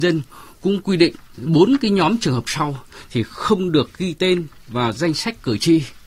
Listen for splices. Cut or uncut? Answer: uncut